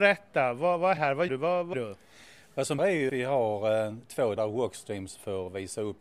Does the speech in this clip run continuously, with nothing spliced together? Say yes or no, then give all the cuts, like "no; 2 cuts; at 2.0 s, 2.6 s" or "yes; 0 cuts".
no; 6 cuts; at 1.0 s, 1.3 s, 1.7 s, 2.8 s, 3.1 s, 4.4 s